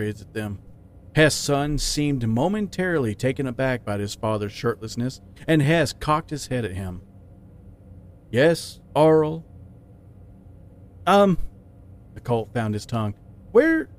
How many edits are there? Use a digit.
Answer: 0